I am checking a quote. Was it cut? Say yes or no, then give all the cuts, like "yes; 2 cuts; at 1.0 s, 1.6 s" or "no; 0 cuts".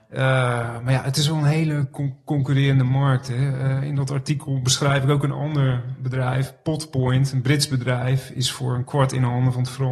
no; 0 cuts